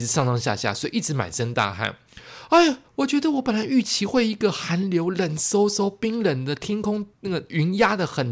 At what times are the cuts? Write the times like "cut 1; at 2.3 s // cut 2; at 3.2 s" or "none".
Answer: cut 1; at 2.9 s // cut 2; at 7.1 s